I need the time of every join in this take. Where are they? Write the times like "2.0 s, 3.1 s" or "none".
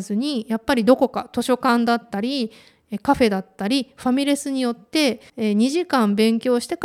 5.3 s